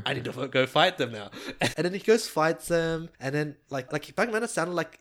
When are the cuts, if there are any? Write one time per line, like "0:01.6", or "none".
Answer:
0:01.7
0:03.1
0:03.9